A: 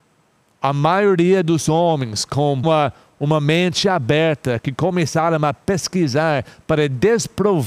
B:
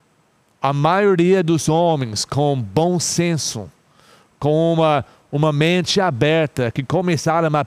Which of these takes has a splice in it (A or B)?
A